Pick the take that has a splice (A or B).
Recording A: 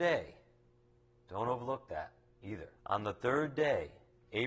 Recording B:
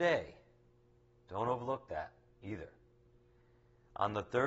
A